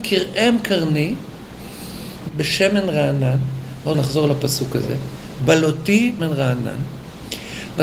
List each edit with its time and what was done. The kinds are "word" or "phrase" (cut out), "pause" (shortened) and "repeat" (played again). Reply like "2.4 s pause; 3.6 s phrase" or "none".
2.3 s word; 3.9 s word; 6.2 s word